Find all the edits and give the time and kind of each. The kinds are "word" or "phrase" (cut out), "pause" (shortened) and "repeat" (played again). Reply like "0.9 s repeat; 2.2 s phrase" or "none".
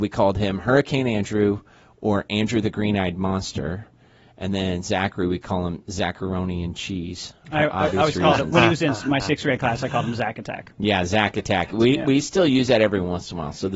none